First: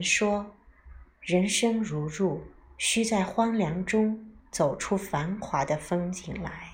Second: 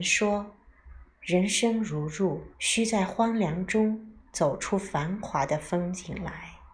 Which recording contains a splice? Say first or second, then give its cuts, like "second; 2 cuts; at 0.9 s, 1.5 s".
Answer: second; 1 cut; at 2.5 s